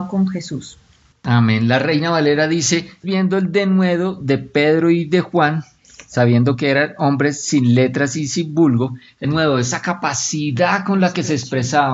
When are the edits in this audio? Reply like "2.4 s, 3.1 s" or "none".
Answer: 3.0 s, 9.2 s